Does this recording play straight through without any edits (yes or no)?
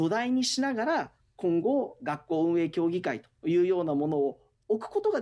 yes